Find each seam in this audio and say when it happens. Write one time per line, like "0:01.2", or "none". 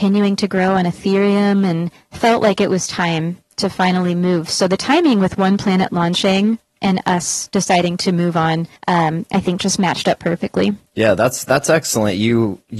0:02.0
0:08.8
0:10.9